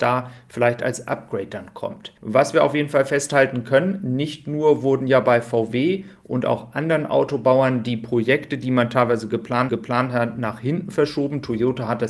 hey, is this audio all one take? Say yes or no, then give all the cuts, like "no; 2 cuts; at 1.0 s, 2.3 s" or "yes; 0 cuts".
no; 2 cuts; at 2.2 s, 9.7 s